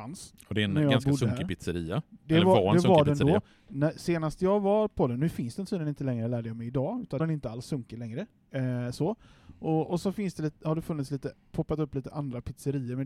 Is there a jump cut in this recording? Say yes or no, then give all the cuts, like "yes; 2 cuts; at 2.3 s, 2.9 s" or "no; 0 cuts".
yes; 1 cut; at 7.2 s